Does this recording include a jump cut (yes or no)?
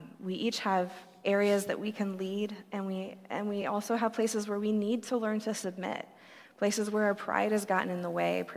no